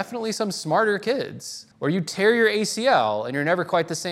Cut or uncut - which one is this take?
cut